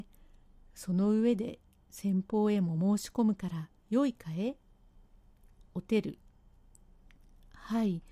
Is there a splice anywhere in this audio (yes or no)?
yes